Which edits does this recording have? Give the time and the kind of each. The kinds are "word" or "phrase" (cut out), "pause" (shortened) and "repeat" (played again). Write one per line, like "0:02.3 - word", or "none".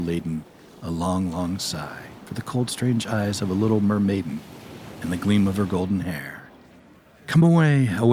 0:02.2 - pause